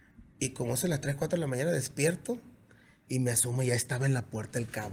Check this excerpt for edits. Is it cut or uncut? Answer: uncut